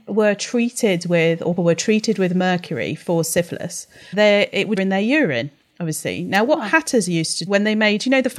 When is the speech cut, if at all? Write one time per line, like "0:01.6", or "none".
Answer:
0:01.6
0:04.1
0:04.8
0:07.5